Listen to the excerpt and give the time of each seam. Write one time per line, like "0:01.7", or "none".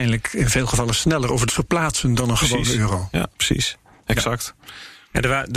0:01.5
0:03.3

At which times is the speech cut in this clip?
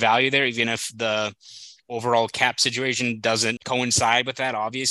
0:03.6

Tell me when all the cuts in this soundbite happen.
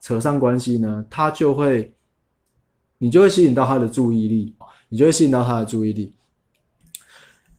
0:04.6

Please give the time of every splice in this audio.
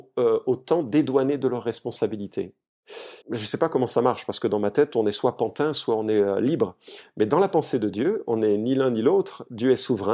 0:03.2

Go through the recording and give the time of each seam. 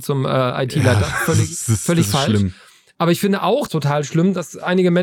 0:03.7

